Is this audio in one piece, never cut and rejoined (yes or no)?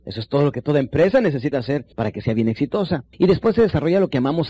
no